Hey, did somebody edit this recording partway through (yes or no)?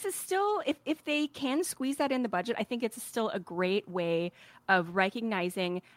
no